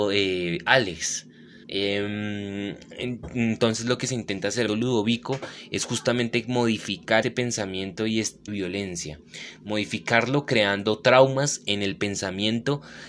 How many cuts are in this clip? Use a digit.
4